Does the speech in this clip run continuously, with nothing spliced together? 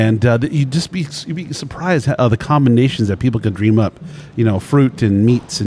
no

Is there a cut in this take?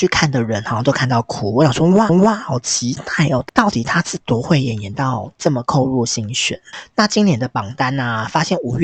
yes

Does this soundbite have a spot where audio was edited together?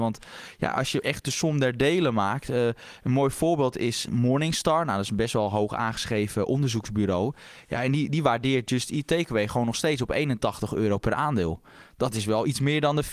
yes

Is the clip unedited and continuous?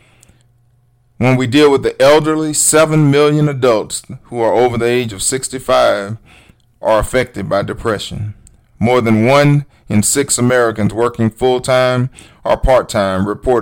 yes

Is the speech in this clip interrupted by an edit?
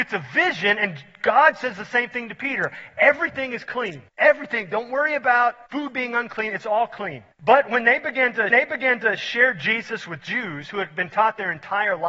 yes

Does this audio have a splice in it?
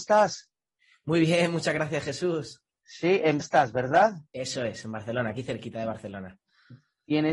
yes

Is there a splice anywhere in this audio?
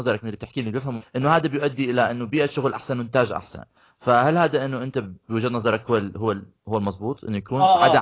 yes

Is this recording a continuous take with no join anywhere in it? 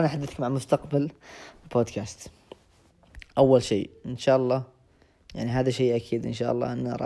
yes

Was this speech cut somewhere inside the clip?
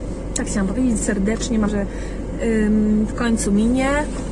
yes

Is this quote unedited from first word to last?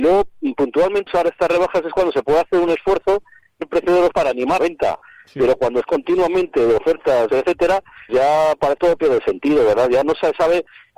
no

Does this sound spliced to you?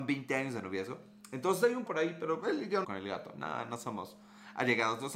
yes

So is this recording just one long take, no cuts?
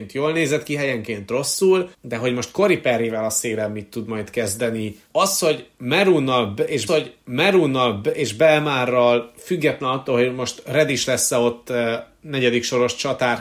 no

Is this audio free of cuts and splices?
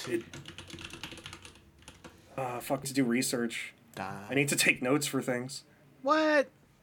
no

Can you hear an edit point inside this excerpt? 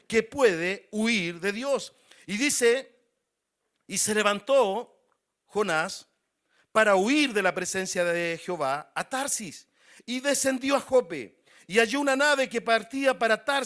no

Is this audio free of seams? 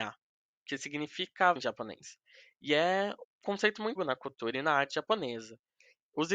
no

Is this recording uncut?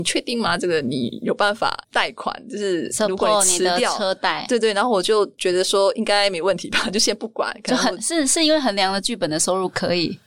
no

